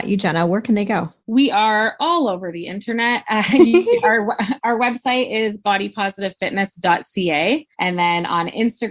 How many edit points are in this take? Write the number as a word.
two